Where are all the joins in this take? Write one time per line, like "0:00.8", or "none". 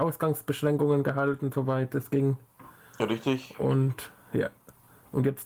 none